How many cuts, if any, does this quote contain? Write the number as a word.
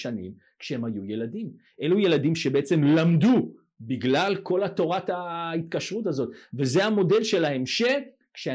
zero